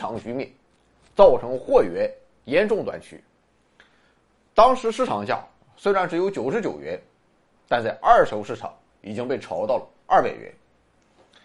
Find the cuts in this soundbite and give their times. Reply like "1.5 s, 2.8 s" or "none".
none